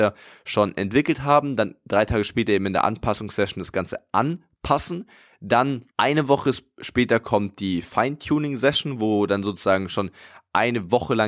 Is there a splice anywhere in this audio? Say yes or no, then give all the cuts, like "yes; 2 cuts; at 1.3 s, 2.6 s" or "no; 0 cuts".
no; 0 cuts